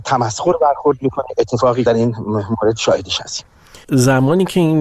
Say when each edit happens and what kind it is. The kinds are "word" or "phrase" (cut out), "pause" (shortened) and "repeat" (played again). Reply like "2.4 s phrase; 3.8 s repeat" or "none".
1.9 s phrase